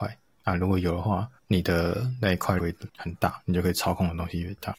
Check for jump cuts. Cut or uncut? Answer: cut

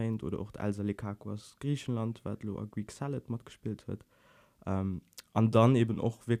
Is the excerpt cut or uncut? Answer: uncut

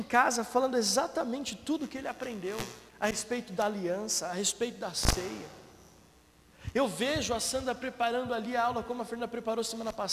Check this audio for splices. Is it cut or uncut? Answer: cut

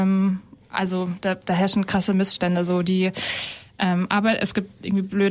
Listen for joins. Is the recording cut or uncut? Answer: uncut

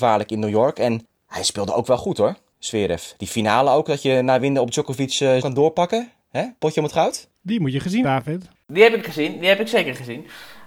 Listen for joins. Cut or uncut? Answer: cut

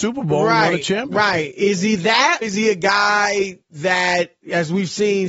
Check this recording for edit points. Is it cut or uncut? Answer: cut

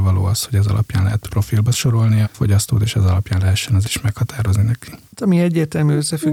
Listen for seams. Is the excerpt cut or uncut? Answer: cut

